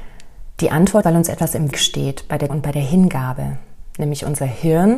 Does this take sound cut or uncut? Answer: cut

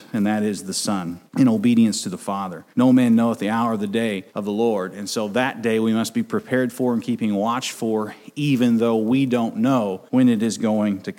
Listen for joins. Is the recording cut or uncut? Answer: cut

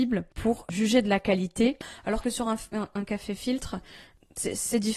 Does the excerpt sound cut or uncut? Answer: uncut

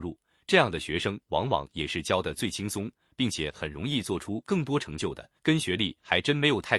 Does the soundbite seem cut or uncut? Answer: cut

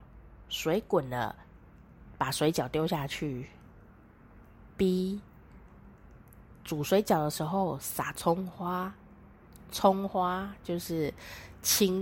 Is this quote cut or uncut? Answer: uncut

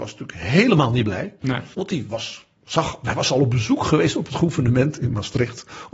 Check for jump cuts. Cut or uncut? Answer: cut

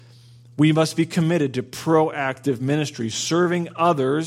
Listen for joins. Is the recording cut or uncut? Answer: uncut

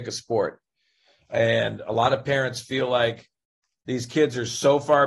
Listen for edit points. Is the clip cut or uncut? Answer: uncut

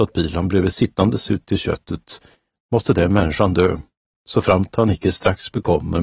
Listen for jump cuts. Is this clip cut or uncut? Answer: uncut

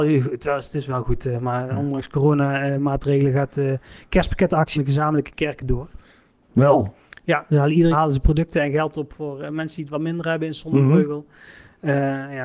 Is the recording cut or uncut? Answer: cut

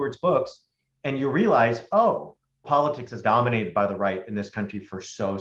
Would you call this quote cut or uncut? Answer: cut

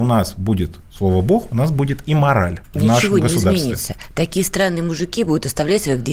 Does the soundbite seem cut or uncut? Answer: cut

